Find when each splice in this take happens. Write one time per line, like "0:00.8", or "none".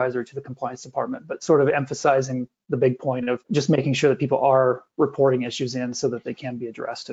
0:03.4